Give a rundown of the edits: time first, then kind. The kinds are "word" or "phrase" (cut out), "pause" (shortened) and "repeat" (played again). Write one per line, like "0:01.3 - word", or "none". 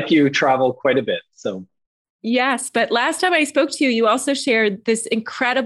none